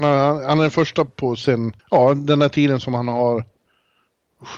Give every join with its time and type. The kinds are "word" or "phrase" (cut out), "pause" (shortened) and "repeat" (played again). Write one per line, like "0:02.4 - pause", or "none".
0:01.1 - word
0:01.8 - pause